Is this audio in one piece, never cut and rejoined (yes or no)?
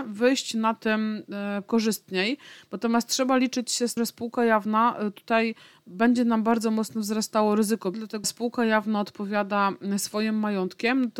no